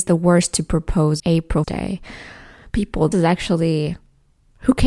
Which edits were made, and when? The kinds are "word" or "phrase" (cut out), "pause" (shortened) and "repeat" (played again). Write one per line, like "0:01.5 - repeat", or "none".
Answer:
0:01.2 - word
0:01.6 - word
0:03.1 - word

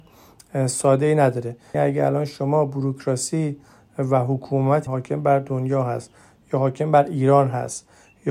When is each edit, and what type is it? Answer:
0:01.7 - word
0:04.9 - word

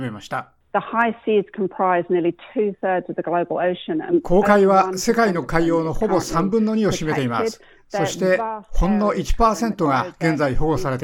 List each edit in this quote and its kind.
none

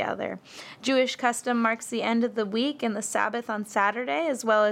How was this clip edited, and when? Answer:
none

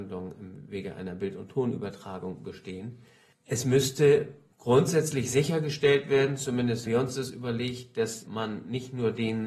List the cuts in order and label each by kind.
0:06.8 - word
0:08.2 - word

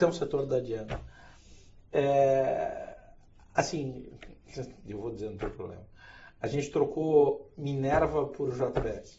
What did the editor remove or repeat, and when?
none

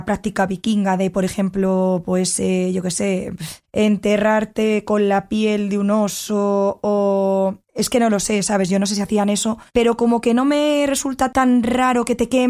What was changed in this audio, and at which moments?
0:03.6 - pause
0:07.6 - pause
0:09.7 - pause

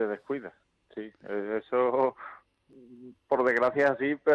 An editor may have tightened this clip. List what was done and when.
none

